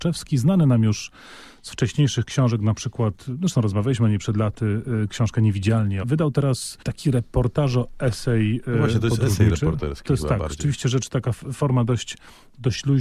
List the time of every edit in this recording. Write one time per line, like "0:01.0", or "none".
0:06.0